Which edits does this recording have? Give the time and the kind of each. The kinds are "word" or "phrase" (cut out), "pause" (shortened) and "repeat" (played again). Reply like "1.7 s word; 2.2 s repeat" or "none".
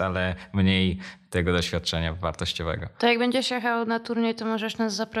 none